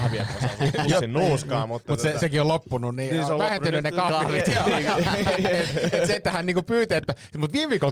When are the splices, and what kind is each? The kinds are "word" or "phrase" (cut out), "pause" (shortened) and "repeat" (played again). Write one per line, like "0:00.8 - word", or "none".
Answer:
none